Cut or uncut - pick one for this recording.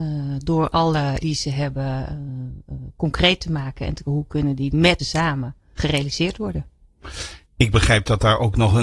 cut